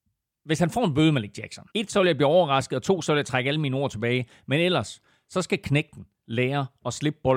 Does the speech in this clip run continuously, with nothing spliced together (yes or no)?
no